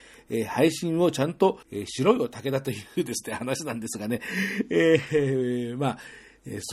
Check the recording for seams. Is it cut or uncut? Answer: cut